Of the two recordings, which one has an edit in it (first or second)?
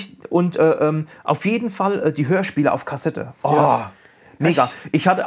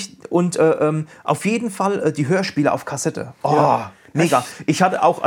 second